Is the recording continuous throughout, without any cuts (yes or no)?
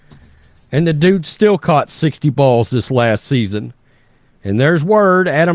yes